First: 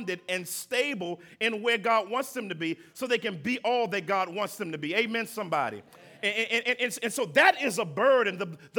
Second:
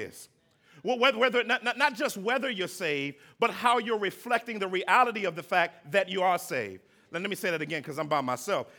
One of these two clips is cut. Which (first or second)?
first